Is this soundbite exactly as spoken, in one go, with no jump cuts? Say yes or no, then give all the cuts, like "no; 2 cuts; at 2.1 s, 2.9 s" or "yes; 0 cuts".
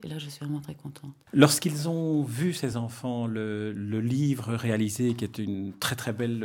yes; 0 cuts